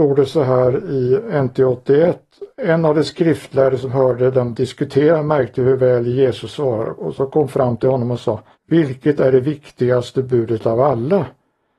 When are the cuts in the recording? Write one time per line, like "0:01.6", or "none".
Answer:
0:02.5
0:08.5